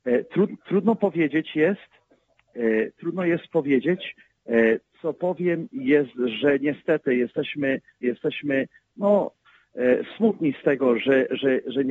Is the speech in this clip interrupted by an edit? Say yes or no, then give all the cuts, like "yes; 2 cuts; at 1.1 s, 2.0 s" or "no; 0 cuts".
yes; 1 cut; at 8.0 s